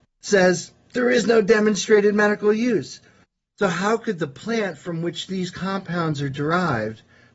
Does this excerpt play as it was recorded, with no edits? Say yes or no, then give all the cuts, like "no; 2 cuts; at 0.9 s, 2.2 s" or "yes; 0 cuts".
yes; 0 cuts